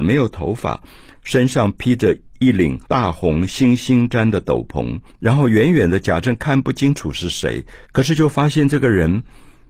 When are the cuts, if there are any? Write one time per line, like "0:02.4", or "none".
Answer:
0:02.3
0:02.8
0:05.1
0:07.8